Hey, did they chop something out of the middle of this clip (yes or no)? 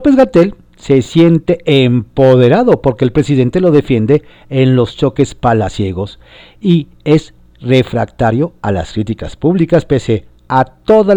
no